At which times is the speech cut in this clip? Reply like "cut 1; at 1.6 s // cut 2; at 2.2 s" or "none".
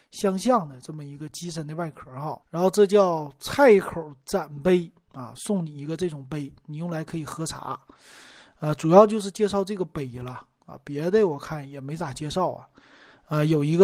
cut 1; at 2.4 s